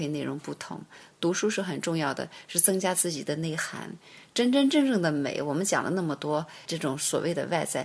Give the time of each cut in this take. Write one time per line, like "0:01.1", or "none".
0:06.7